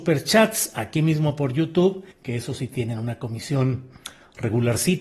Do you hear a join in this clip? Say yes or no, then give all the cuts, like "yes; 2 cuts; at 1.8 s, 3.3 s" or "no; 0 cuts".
yes; 1 cut; at 2.1 s